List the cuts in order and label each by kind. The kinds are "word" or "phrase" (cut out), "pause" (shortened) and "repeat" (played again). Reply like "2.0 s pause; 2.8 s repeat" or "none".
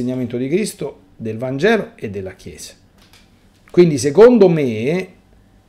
none